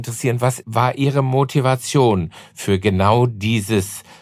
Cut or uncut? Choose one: uncut